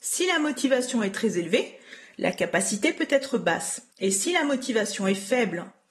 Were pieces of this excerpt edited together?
yes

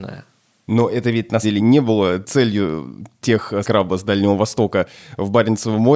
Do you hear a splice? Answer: yes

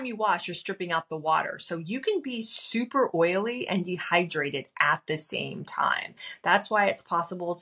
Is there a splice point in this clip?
no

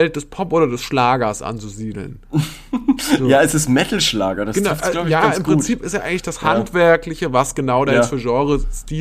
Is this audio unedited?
yes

